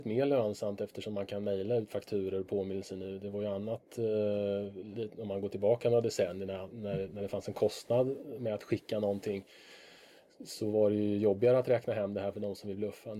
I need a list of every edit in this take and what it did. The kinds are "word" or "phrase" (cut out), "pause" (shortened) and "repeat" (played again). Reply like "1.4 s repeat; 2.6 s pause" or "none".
none